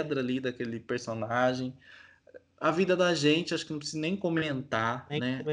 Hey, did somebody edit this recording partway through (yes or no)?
no